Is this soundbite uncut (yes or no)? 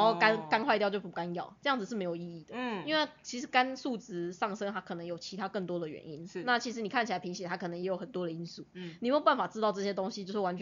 no